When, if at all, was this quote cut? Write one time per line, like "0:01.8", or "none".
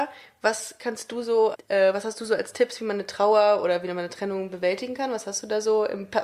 0:01.5